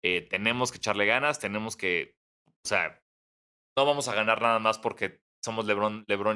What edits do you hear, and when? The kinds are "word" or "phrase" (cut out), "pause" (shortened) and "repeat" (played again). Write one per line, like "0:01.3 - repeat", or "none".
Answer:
none